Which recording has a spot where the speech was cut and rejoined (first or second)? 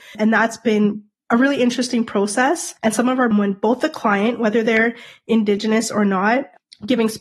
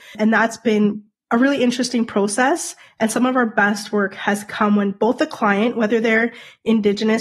first